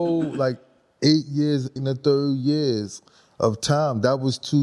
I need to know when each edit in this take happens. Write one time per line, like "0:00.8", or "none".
0:01.8

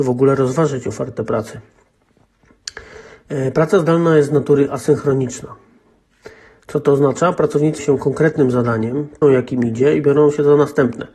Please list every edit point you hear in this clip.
0:07.8
0:09.2

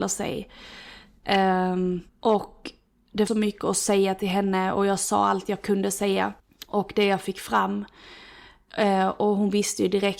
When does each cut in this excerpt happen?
0:02.1
0:03.3
0:06.4

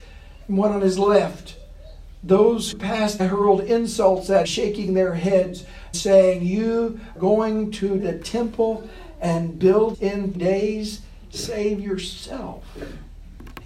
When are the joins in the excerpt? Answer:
0:02.7
0:03.2
0:04.4
0:05.9
0:07.2
0:08.0
0:09.9
0:10.3

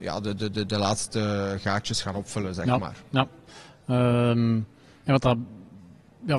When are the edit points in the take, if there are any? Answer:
none

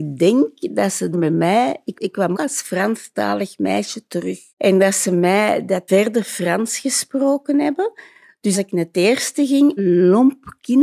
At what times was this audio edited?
0:01.1
0:01.9
0:02.3
0:04.5
0:05.9
0:08.5
0:09.8

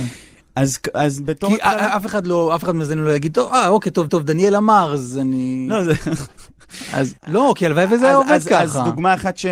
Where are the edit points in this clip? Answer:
0:04.1
0:07.2

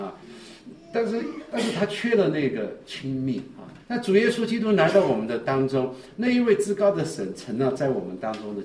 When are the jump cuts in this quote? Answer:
0:03.8

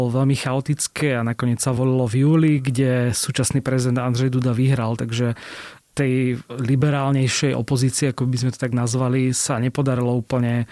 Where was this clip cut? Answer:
none

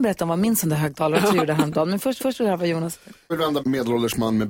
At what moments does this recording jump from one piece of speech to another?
0:02.2
0:03.3
0:03.6

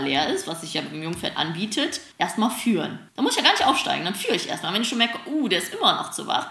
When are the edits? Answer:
0:02.1
0:03.1

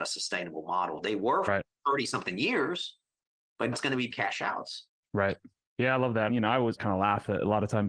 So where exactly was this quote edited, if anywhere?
0:01.5
0:03.7
0:04.1
0:06.3

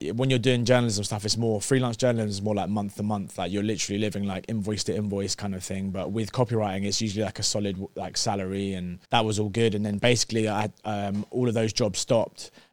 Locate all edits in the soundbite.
0:09.0

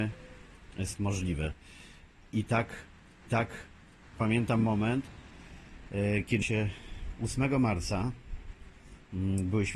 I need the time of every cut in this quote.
0:01.0
0:03.3
0:06.4

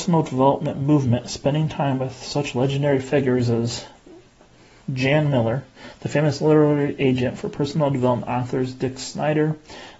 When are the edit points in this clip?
none

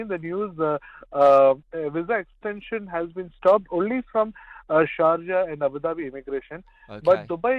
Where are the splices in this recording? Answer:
none

